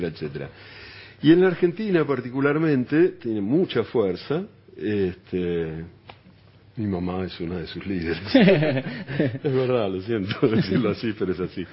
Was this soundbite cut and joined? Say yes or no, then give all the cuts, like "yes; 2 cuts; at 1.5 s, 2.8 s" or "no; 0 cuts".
no; 0 cuts